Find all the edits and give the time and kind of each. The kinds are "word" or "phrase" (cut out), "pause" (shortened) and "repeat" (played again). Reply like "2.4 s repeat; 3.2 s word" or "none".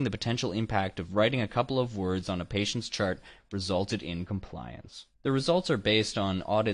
5.1 s pause